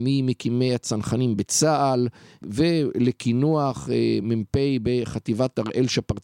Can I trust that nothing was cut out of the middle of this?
yes; 0 cuts

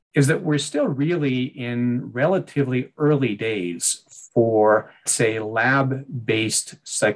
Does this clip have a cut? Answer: yes; 1 cut; at 5.1 s

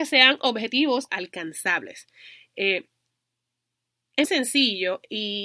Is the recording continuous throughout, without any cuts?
no; 2 cuts; at 1.1 s, 4.2 s

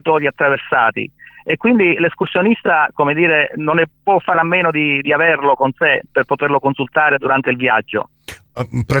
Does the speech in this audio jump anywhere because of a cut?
no; 0 cuts

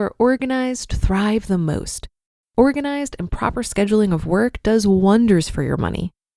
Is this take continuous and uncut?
yes; 0 cuts

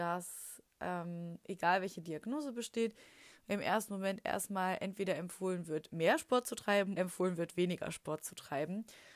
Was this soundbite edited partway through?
yes; 1 cut; at 7.0 s

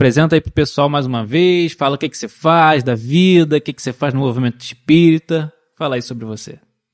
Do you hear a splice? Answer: no; 0 cuts

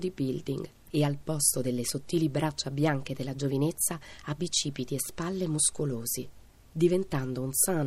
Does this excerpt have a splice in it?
no; 0 cuts

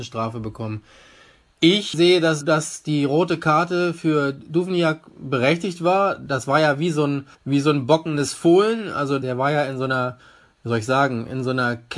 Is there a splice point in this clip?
yes; 2 cuts; at 2.4 s, 7.3 s

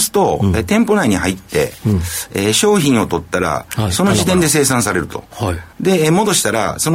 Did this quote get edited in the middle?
yes; 1 cut; at 5.7 s

